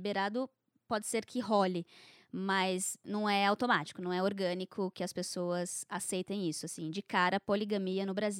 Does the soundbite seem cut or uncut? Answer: uncut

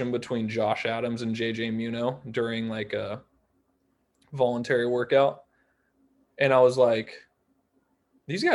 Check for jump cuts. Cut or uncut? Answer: uncut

